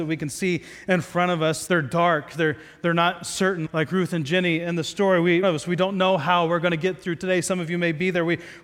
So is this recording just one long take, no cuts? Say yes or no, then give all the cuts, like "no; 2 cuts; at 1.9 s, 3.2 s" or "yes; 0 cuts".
no; 3 cuts; at 1.7 s, 3.7 s, 5.4 s